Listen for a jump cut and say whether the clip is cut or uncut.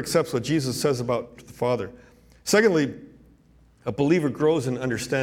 cut